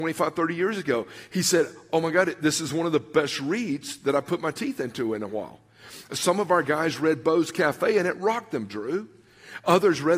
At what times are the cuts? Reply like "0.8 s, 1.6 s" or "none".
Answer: none